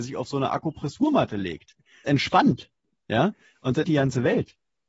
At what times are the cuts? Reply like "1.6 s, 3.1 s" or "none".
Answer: 2.0 s, 3.8 s